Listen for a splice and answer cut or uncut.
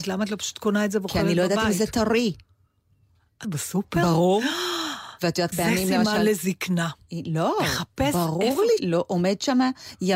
cut